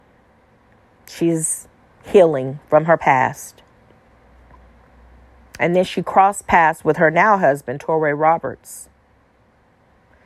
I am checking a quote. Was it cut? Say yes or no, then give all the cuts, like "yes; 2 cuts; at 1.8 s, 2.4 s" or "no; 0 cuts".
no; 0 cuts